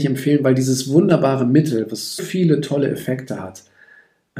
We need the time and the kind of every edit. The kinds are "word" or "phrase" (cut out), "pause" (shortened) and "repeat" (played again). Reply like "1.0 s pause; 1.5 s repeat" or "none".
2.2 s word